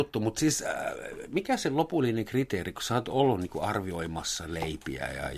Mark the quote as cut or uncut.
uncut